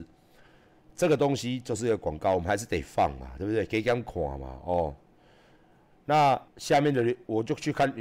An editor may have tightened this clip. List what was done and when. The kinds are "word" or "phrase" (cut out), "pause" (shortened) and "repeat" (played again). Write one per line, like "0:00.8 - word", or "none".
0:06.5 - pause